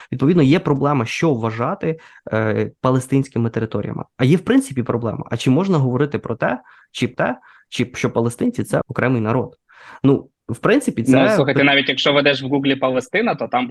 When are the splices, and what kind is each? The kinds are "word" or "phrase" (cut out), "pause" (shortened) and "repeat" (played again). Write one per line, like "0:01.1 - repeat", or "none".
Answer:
0:07.1 - repeat
0:08.8 - word
0:10.4 - pause